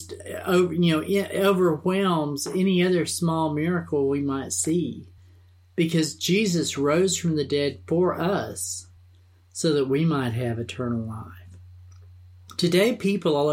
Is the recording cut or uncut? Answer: uncut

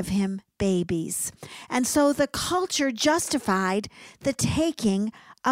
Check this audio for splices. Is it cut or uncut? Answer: uncut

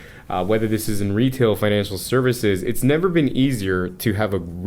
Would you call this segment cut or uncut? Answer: uncut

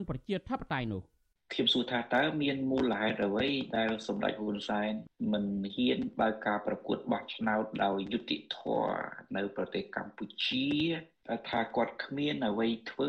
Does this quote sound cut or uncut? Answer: uncut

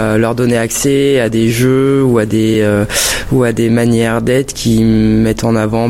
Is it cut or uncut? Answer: uncut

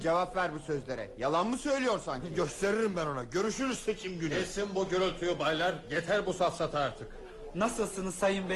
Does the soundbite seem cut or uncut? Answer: uncut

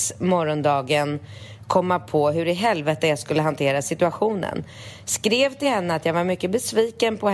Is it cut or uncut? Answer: uncut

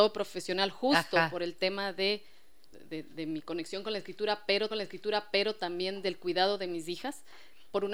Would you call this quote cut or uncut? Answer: cut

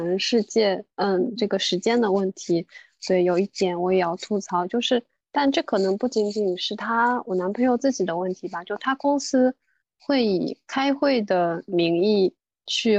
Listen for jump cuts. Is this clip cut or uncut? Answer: uncut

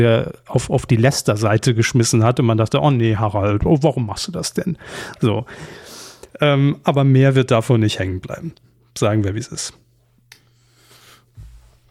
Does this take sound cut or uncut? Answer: uncut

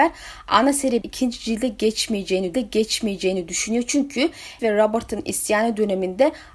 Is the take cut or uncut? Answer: cut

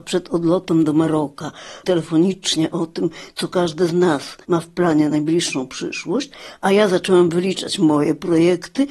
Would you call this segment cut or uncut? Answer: cut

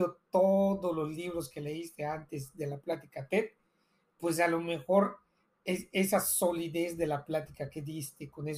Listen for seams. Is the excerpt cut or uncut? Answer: uncut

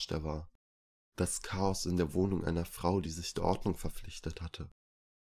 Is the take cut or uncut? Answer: uncut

